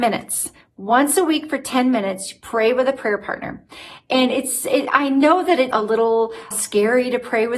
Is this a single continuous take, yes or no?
no